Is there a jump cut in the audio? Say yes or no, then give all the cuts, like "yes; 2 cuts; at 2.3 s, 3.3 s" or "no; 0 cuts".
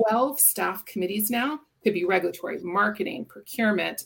yes; 1 cut; at 2.6 s